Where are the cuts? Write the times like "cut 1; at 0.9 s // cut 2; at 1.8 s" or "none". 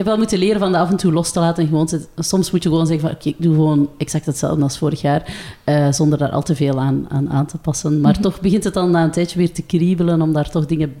none